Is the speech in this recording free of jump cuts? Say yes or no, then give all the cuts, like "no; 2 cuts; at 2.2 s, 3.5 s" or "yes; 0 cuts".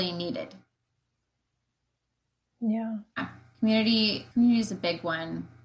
no; 1 cut; at 4.3 s